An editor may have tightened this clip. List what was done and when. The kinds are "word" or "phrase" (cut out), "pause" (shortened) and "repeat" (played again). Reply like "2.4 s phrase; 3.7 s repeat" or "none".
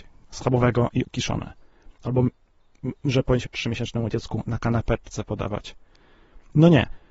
1.0 s word; 3.5 s word